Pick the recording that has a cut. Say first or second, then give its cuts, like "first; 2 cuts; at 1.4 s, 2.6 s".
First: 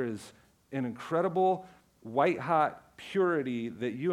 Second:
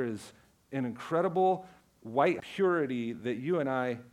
second; 1 cut; at 2.4 s